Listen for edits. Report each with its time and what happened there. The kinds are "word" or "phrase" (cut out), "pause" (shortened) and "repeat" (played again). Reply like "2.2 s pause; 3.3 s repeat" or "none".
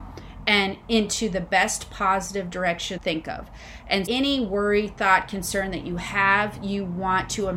3.0 s phrase; 4.1 s word